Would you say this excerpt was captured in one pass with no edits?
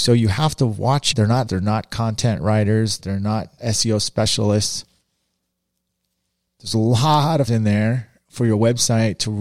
no; 5 cuts; at 1.1 s, 1.5 s, 3.0 s, 3.6 s, 7.5 s

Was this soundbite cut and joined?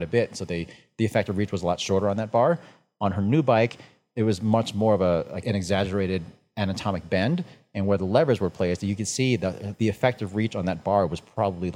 yes; 2 cuts; at 5.4 s, 9.7 s

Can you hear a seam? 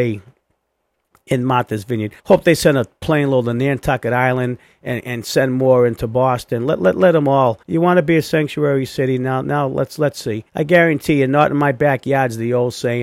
yes; 3 cuts; at 2.2 s, 7.6 s, 10.5 s

